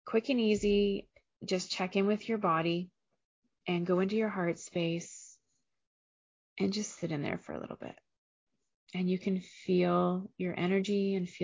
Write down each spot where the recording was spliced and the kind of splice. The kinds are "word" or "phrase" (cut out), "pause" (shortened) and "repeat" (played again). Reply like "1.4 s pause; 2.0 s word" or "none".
none